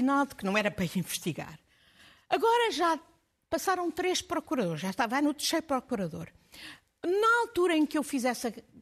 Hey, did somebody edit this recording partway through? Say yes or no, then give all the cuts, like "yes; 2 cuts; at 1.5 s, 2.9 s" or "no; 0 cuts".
no; 0 cuts